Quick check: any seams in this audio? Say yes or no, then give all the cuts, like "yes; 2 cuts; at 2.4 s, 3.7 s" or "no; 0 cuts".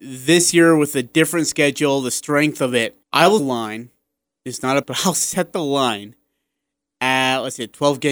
yes; 3 cuts; at 3.0 s, 3.4 s, 4.8 s